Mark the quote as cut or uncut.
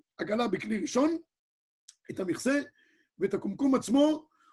uncut